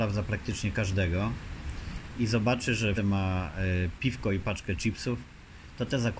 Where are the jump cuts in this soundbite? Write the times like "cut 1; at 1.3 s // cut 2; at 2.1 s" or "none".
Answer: cut 1; at 3.0 s